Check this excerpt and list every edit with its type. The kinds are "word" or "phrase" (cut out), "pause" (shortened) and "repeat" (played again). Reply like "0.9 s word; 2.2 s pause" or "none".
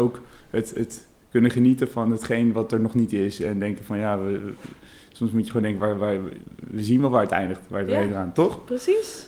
none